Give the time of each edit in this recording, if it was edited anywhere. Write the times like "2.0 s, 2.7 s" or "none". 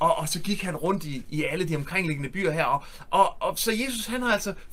none